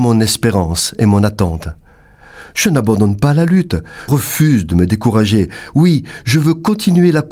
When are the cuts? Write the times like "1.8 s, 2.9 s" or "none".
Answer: 4.1 s